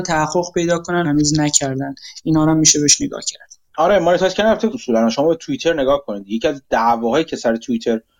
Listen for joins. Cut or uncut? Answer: cut